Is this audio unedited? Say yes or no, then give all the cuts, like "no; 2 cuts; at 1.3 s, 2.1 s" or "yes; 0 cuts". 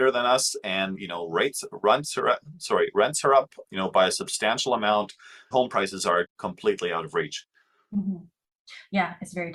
no; 4 cuts; at 0.9 s, 3.6 s, 5.5 s, 6.2 s